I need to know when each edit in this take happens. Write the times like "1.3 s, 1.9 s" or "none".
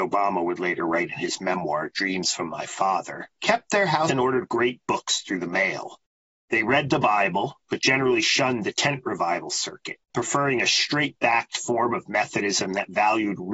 3.3 s, 4.1 s, 10.0 s